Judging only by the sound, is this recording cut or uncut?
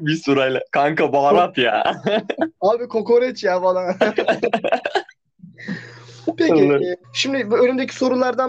cut